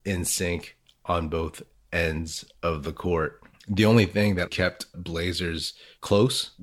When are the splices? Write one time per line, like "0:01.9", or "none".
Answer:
0:04.5
0:04.9

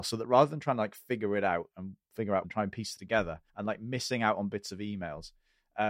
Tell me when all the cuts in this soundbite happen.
0:02.4
0:03.0
0:03.5

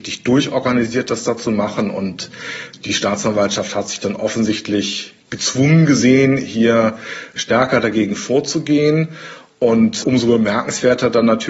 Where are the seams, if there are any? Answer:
none

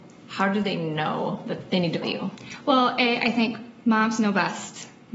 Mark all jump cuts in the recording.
0:01.7
0:02.0

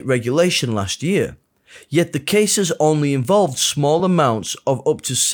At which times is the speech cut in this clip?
none

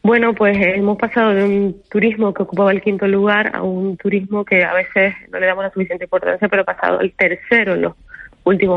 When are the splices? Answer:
none

